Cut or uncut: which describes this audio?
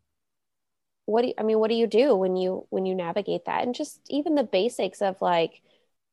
uncut